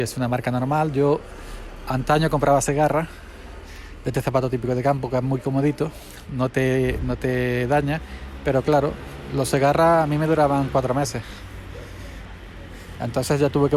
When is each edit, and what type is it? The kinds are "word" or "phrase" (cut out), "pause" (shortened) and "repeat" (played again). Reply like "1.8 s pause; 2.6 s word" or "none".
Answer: none